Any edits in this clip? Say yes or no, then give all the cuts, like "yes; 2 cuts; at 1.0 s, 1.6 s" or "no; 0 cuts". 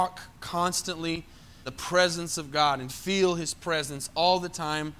yes; 2 cuts; at 1.7 s, 2.9 s